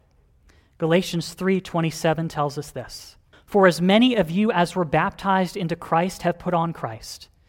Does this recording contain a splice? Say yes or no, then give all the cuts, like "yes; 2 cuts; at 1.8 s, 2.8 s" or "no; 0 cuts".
yes; 1 cut; at 3.3 s